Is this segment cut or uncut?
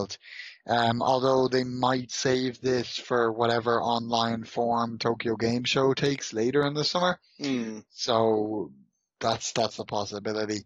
uncut